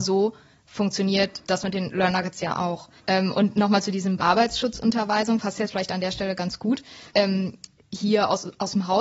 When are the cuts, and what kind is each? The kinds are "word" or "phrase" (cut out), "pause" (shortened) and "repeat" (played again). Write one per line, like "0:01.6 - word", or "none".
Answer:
0:01.4 - word
0:03.0 - pause
0:04.2 - word
0:07.1 - pause